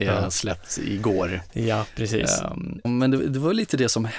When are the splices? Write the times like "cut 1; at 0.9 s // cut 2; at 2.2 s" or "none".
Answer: cut 1; at 2.8 s